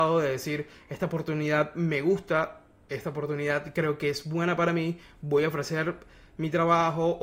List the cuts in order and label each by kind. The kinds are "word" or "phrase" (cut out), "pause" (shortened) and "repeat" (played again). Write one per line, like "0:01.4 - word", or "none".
none